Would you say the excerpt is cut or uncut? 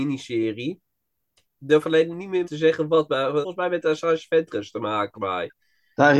cut